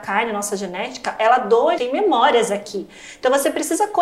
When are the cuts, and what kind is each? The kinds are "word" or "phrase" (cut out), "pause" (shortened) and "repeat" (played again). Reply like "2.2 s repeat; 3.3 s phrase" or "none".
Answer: 1.8 s phrase